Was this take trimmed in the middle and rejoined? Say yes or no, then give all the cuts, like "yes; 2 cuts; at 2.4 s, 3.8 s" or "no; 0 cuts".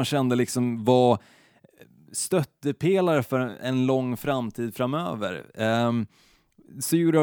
no; 0 cuts